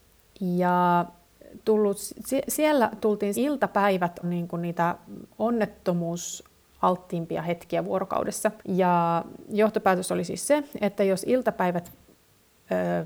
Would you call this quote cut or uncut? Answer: cut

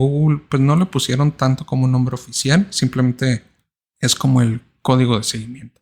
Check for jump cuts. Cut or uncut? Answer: uncut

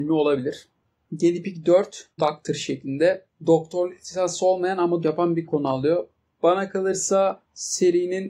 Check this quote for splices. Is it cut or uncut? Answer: cut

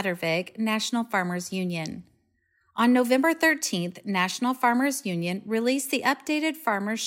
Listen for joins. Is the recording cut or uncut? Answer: uncut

